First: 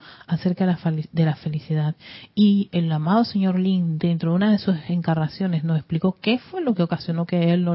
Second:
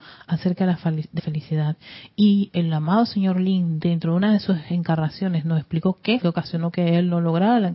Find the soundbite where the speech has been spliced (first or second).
second